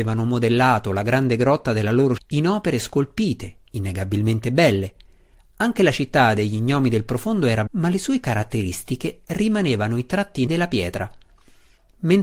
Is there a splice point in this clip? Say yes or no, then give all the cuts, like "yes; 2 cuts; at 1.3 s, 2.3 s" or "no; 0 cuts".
yes; 4 cuts; at 2.2 s, 2.7 s, 7.7 s, 10.5 s